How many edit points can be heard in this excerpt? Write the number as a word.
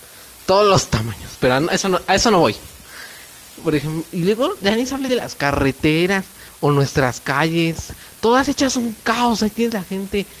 zero